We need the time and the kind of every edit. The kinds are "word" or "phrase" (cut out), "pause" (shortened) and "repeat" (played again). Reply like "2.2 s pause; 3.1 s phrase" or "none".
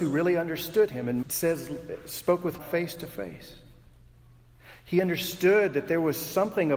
1.2 s word; 2.6 s word